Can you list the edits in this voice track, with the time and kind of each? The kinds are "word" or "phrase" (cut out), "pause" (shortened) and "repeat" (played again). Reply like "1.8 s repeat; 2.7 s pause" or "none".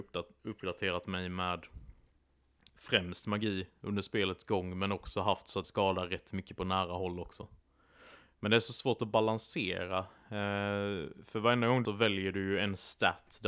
5.6 s phrase; 11.8 s phrase